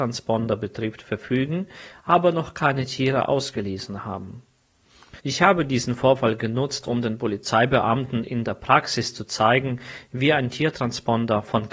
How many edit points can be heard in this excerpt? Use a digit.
1